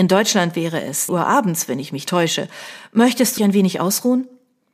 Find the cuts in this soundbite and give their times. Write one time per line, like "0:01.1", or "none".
0:01.1
0:02.1
0:03.4